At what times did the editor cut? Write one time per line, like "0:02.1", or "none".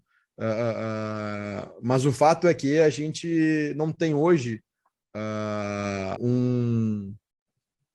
0:06.2